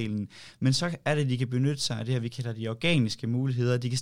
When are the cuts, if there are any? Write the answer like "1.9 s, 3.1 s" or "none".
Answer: none